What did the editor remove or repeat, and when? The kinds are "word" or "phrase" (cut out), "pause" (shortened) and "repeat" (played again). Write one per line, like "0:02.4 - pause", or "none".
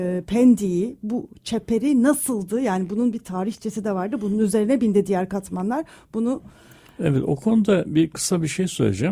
none